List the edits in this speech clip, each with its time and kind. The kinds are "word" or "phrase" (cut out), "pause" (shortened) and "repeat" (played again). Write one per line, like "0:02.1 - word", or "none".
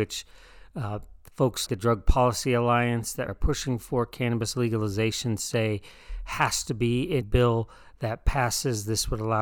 0:01.7 - word
0:03.3 - word
0:07.2 - word